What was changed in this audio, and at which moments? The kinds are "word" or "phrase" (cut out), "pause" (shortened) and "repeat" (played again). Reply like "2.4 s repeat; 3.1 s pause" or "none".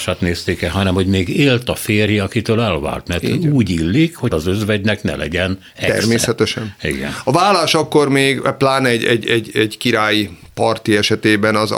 4.3 s word

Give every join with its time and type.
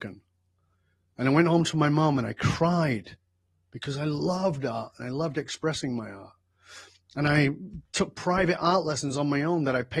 none

